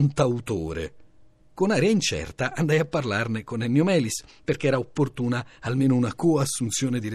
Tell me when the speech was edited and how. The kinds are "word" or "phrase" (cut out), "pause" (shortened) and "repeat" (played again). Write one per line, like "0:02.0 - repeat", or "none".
none